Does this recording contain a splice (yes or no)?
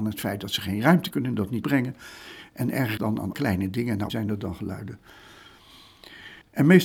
yes